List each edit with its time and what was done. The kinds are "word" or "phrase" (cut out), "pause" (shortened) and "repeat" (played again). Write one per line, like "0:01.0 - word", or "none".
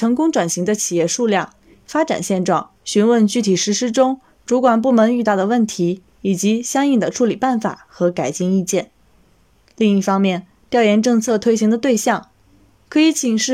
0:02.8 - pause
0:06.1 - pause